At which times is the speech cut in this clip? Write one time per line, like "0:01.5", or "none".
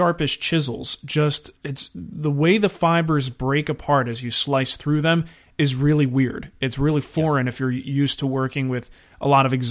0:01.6